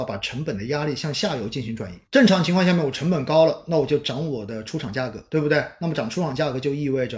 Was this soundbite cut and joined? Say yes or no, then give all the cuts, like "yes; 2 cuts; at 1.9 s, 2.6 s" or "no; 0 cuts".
yes; 1 cut; at 2.1 s